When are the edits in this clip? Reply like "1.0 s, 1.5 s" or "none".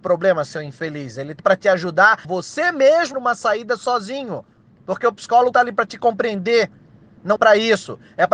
1.4 s, 2.2 s, 3.1 s, 5.5 s, 7.4 s